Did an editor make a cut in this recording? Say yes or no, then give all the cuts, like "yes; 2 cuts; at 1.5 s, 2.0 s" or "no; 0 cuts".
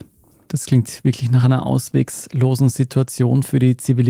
no; 0 cuts